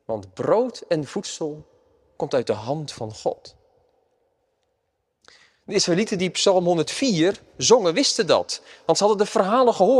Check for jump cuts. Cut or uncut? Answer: uncut